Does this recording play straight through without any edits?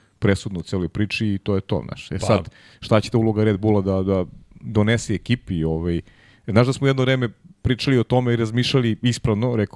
yes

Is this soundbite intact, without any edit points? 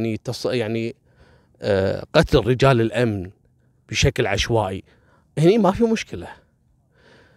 yes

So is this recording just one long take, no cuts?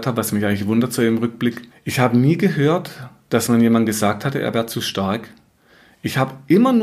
yes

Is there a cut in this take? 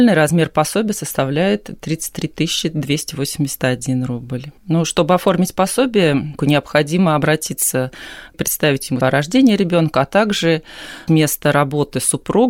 yes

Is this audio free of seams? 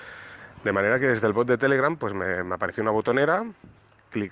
yes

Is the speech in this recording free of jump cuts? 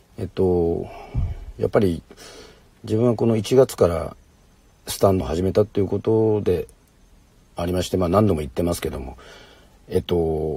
no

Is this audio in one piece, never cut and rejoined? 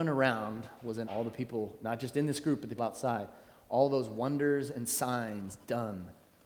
no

